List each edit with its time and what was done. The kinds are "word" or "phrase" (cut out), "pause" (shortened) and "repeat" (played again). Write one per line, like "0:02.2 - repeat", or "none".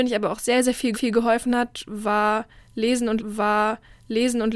0:00.9 - repeat
0:03.2 - repeat